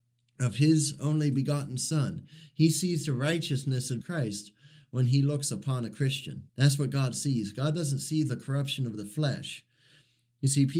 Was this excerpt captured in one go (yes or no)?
no